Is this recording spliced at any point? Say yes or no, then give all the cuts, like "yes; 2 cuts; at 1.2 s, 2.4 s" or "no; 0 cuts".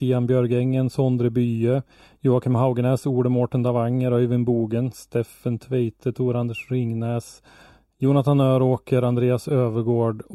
no; 0 cuts